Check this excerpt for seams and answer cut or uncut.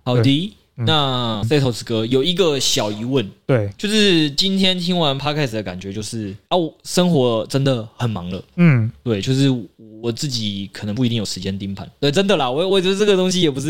cut